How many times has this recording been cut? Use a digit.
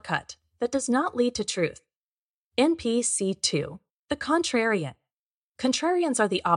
1